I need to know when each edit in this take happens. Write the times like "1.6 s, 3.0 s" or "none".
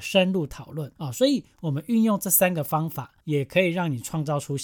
1.0 s, 3.2 s